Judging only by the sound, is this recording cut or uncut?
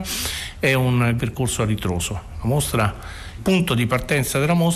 cut